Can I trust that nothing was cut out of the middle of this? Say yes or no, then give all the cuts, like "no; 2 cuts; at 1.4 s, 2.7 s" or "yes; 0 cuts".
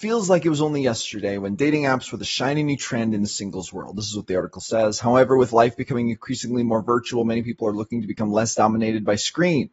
yes; 0 cuts